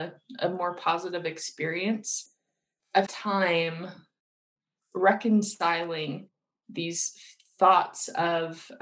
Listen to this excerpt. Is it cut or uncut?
cut